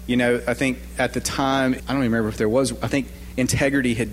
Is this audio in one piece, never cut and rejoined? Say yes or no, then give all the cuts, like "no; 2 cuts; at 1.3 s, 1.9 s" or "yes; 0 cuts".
no; 1 cut; at 1.8 s